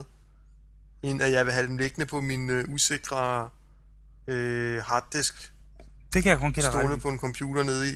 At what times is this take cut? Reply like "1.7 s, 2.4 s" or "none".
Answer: none